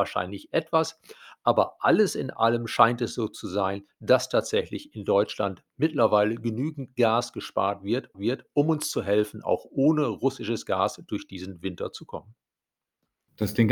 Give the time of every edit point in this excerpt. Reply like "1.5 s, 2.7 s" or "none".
8.1 s